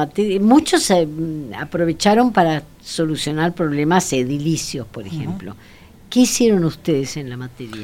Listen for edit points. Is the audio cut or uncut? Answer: uncut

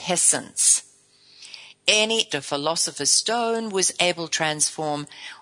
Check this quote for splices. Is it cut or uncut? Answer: cut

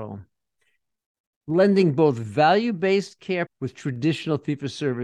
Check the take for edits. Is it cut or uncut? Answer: cut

